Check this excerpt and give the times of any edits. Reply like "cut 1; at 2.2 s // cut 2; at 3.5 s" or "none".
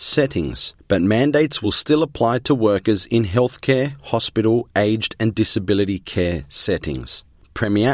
none

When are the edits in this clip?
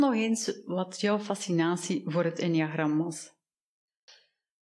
none

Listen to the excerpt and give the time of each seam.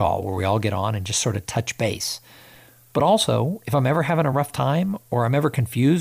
none

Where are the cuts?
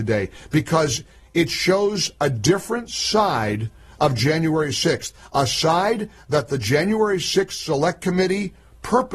none

